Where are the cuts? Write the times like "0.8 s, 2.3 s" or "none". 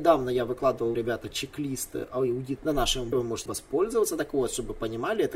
0.9 s, 2.6 s, 3.1 s, 3.5 s